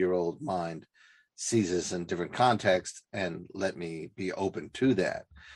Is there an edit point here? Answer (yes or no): no